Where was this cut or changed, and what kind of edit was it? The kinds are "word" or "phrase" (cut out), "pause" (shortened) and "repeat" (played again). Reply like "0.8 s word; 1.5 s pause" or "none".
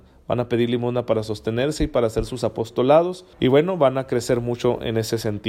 3.3 s pause